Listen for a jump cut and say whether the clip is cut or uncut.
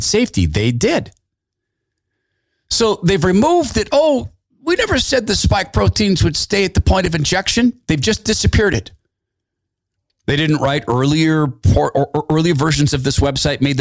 uncut